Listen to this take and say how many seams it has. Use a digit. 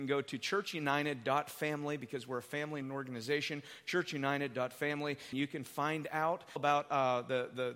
3